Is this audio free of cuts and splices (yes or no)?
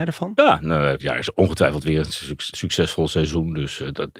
no